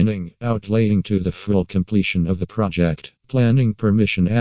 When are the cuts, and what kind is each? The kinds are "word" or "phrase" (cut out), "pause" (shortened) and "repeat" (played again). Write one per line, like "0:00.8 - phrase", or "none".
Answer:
0:03.2 - pause